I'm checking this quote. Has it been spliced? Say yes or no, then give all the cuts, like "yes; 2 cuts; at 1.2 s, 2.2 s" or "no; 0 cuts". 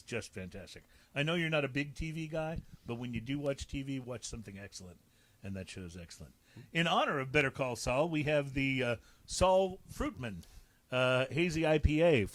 no; 0 cuts